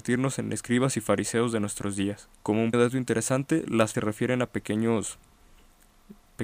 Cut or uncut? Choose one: cut